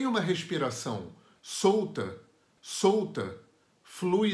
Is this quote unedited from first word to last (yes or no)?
no